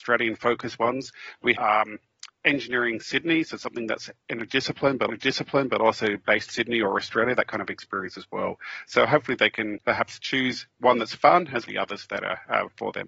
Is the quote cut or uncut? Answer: cut